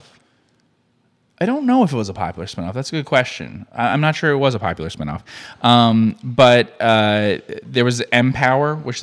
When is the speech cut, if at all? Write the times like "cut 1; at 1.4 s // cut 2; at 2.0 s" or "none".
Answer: none